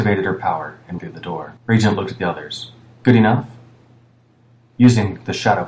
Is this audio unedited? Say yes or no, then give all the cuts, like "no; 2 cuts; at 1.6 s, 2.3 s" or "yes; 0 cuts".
no; 2 cuts; at 1.0 s, 1.6 s